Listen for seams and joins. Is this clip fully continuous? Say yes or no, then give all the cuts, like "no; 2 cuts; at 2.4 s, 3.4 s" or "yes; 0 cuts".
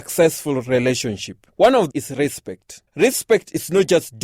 no; 3 cuts; at 1.5 s, 1.9 s, 2.9 s